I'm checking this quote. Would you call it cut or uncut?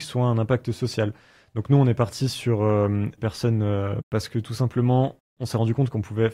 cut